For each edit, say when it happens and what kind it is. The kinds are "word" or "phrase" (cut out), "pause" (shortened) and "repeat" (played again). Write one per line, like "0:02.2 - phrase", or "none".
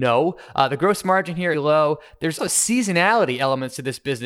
0:01.5 - phrase
0:02.4 - word